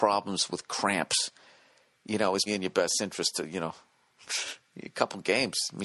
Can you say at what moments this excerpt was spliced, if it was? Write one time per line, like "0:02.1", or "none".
0:02.5